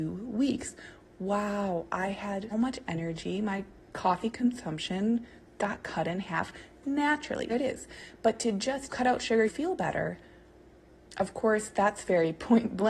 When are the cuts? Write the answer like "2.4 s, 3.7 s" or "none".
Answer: 2.5 s, 7.5 s, 8.9 s, 9.5 s